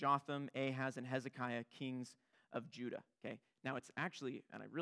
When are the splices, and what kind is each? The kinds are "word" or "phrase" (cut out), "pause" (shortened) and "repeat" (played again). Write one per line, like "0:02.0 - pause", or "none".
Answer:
none